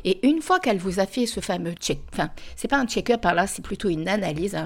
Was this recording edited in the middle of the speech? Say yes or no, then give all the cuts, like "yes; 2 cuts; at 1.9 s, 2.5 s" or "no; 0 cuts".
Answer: yes; 1 cut; at 1.8 s